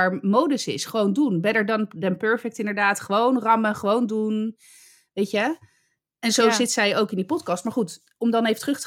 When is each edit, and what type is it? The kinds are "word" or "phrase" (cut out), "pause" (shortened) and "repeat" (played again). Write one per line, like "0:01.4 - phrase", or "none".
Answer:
none